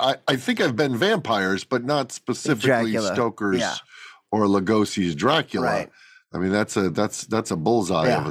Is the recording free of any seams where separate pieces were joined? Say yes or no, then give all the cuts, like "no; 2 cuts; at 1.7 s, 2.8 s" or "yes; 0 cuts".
yes; 0 cuts